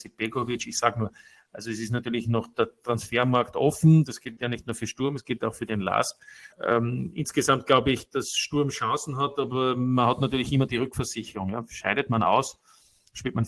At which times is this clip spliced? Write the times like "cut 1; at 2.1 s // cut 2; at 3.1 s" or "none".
cut 1; at 6.5 s